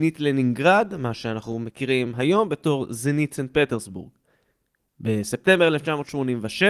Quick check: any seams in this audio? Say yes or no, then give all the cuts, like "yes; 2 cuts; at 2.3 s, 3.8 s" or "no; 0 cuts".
no; 0 cuts